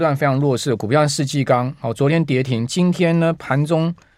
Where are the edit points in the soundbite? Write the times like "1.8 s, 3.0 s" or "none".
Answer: none